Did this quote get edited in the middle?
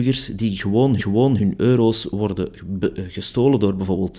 yes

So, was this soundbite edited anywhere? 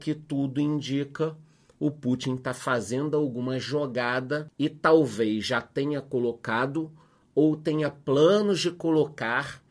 no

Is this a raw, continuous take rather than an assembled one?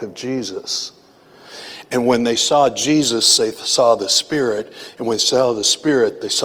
yes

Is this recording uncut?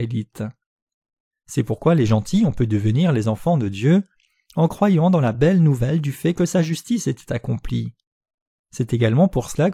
yes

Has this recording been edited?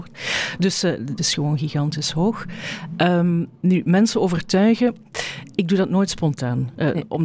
yes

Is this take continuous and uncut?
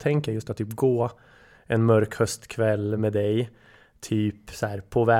yes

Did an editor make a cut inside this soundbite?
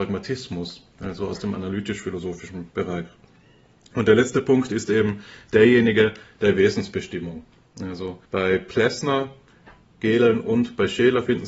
yes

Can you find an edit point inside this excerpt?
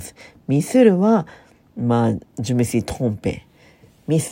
yes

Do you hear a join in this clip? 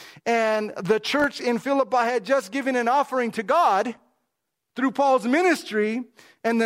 no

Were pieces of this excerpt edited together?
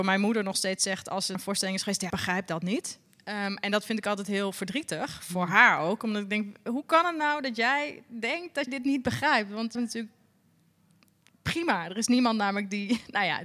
yes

